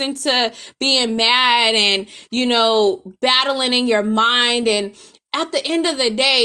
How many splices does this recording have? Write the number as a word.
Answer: zero